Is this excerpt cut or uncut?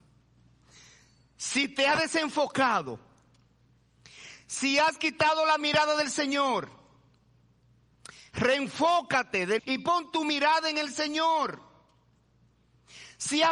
cut